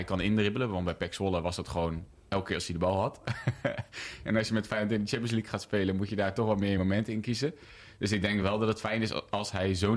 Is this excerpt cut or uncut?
uncut